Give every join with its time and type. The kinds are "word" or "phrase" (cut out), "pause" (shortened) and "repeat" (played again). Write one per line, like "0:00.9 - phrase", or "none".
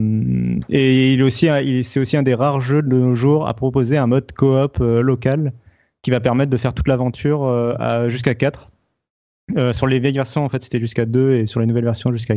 none